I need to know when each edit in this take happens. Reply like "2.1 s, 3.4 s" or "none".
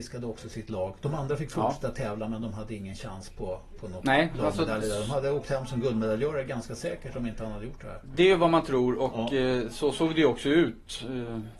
none